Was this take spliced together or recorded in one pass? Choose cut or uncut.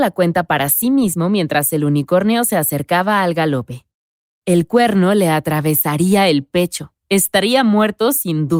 cut